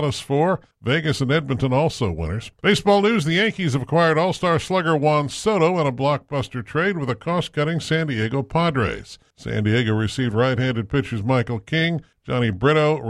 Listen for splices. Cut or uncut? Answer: cut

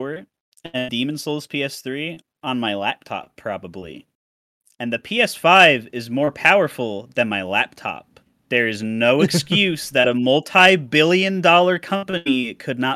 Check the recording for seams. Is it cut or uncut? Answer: cut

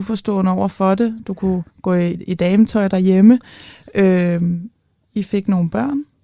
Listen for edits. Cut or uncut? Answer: cut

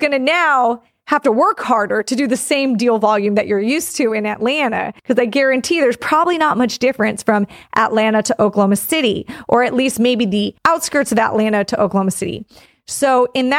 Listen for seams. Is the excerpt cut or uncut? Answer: cut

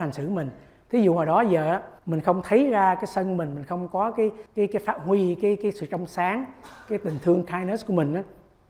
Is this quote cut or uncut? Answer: cut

